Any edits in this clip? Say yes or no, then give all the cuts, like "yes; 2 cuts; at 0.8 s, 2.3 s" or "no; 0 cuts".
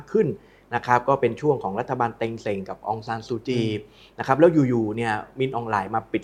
no; 0 cuts